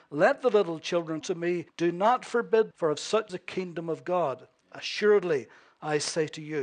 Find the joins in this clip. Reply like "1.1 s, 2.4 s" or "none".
1.2 s, 1.7 s, 2.7 s, 3.3 s